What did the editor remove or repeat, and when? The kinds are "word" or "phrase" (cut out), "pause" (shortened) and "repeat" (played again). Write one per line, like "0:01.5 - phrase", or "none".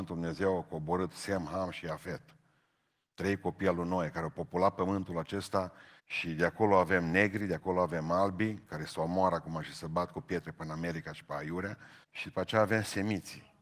0:06.0 - pause
0:12.0 - pause